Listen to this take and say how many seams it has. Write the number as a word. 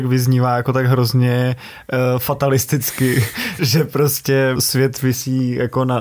two